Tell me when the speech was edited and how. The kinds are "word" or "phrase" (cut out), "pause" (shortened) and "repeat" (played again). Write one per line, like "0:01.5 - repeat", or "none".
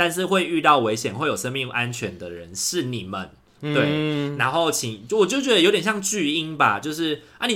none

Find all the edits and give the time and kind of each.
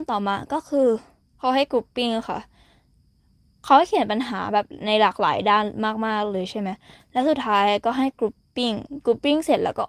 none

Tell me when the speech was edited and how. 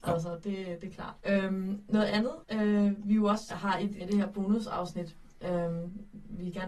0:01.2 - pause
0:02.4 - pause
0:03.5 - word
0:04.0 - word

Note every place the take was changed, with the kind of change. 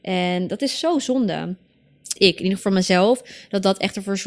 0:02.2 - word
0:02.6 - phrase

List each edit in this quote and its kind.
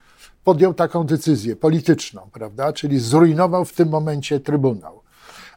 none

